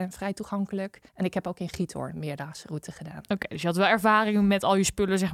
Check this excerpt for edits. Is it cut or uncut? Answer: cut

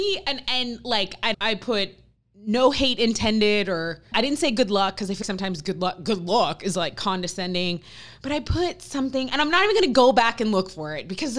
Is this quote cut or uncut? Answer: cut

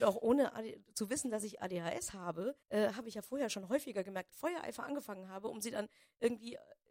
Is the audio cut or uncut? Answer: cut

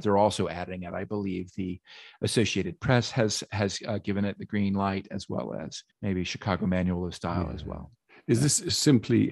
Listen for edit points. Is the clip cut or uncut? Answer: cut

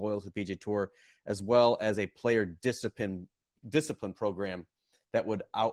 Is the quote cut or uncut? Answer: uncut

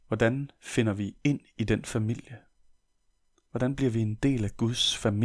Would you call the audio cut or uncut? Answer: uncut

